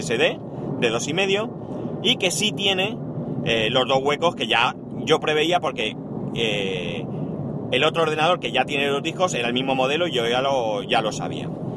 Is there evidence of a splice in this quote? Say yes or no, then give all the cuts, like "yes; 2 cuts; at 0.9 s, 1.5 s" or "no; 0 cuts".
no; 0 cuts